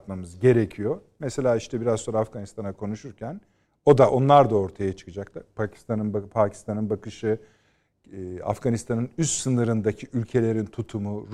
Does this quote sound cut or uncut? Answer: uncut